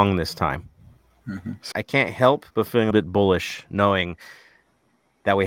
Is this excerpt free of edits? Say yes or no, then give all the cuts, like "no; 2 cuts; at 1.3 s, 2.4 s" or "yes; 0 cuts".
no; 3 cuts; at 1.7 s, 2.5 s, 2.9 s